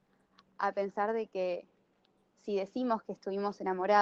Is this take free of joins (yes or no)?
yes